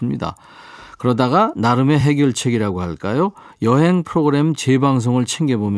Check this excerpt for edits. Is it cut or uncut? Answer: uncut